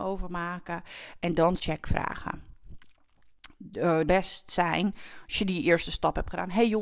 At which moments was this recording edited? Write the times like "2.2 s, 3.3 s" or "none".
1.6 s, 4.1 s